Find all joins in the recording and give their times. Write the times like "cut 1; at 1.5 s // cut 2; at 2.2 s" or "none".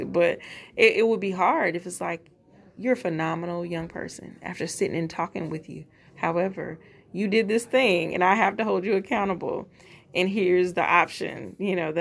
none